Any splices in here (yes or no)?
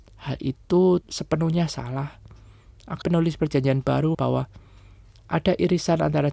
yes